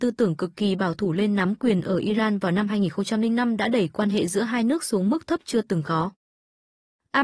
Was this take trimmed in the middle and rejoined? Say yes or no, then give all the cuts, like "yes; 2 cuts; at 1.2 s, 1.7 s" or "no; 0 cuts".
no; 0 cuts